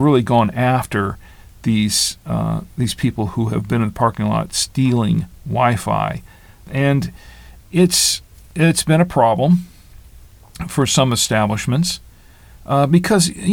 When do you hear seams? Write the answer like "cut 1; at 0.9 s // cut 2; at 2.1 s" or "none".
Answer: none